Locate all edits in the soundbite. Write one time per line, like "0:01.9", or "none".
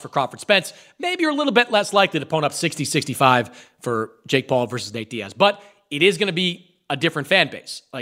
none